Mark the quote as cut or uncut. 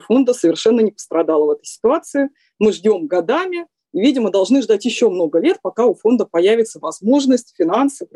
cut